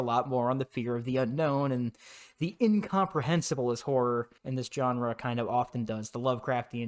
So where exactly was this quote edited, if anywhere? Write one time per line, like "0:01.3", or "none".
0:04.4